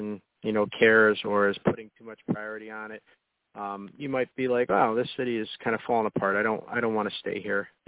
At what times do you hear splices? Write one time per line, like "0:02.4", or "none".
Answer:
none